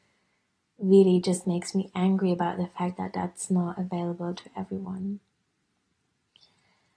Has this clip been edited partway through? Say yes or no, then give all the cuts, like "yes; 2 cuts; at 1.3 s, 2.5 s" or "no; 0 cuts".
no; 0 cuts